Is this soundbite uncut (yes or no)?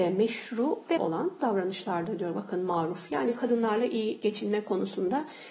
no